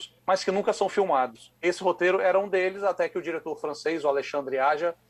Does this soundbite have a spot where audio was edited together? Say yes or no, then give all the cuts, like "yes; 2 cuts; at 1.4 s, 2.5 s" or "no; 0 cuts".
yes; 1 cut; at 1.6 s